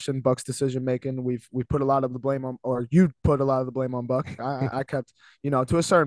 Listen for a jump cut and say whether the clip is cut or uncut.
cut